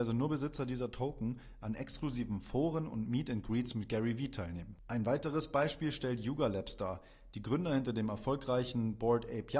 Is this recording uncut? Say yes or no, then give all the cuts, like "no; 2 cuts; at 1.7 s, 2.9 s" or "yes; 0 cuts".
yes; 0 cuts